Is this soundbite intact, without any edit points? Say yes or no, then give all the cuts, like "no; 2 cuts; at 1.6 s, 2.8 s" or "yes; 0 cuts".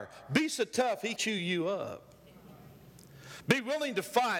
no; 1 cut; at 1.2 s